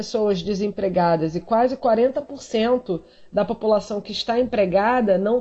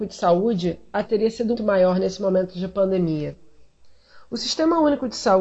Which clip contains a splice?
second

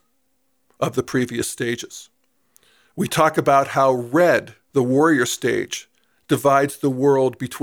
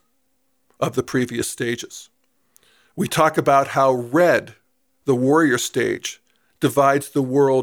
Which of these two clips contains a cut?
first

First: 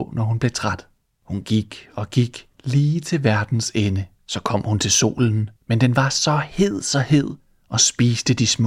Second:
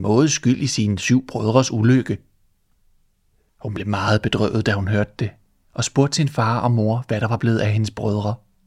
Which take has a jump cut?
first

